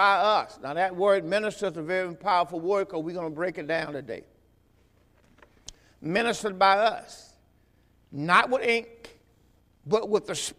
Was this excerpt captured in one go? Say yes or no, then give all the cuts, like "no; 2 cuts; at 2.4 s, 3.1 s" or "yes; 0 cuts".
yes; 0 cuts